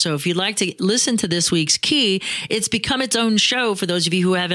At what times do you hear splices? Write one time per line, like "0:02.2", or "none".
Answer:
none